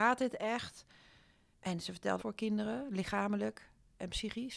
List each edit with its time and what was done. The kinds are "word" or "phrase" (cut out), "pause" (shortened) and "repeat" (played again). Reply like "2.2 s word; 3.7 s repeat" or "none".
2.2 s phrase